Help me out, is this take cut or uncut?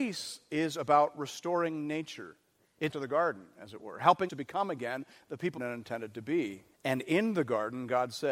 cut